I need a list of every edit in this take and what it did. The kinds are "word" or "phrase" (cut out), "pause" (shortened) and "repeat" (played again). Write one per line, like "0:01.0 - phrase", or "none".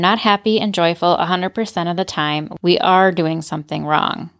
none